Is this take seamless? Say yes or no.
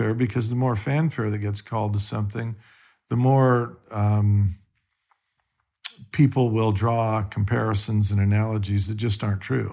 yes